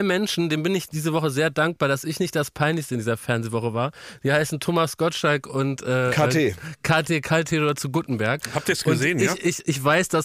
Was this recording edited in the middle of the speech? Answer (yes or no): no